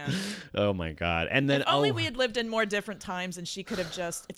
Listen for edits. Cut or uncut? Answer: uncut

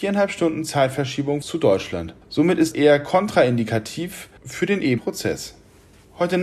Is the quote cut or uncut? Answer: cut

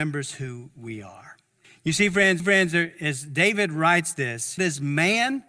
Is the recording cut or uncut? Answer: cut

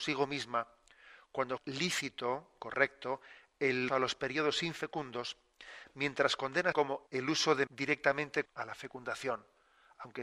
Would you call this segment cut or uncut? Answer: cut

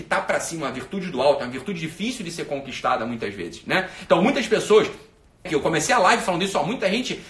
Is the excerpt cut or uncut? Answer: cut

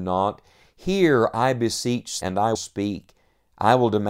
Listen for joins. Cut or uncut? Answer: cut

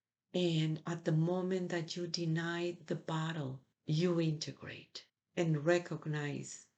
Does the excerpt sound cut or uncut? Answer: cut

